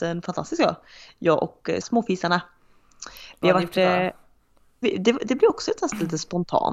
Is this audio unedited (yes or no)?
no